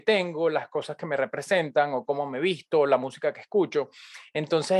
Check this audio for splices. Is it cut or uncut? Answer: uncut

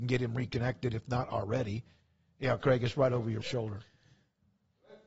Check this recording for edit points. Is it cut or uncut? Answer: cut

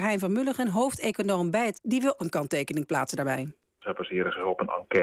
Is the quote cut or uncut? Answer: cut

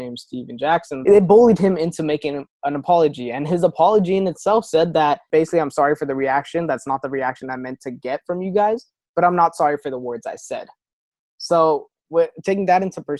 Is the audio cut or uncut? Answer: uncut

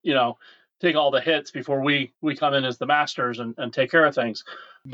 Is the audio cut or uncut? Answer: uncut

